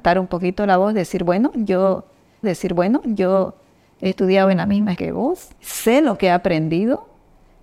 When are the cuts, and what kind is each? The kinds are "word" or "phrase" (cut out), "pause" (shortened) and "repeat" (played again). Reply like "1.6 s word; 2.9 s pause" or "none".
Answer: 2.4 s repeat; 5.0 s word; 5.6 s pause